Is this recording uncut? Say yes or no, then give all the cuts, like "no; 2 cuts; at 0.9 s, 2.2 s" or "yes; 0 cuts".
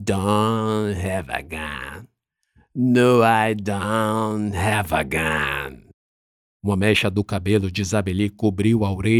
yes; 0 cuts